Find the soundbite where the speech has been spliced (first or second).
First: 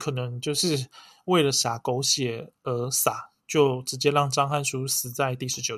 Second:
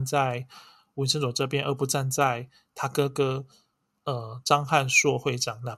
first